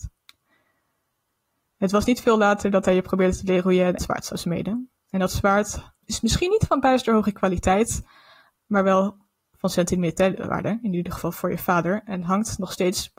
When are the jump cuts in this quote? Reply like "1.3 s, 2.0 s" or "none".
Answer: 4.0 s, 6.0 s